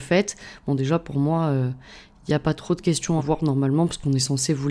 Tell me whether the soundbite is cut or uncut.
cut